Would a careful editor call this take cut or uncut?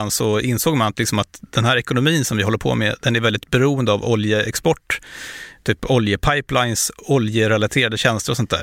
uncut